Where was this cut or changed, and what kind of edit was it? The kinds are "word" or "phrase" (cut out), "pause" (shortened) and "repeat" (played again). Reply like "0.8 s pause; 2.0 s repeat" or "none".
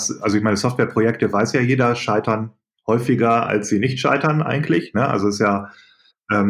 none